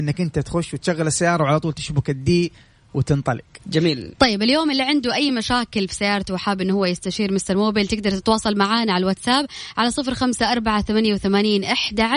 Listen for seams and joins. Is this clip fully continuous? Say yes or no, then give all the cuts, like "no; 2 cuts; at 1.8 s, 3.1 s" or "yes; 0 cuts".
yes; 0 cuts